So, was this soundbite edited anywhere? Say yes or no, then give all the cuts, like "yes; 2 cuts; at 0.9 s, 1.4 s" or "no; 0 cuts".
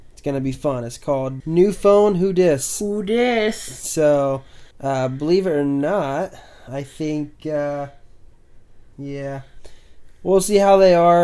yes; 3 cuts; at 1.4 s, 4.7 s, 8.9 s